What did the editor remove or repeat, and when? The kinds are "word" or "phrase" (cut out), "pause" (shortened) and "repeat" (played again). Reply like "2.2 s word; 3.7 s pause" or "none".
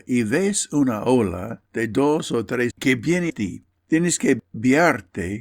1.7 s pause; 2.7 s word; 3.3 s word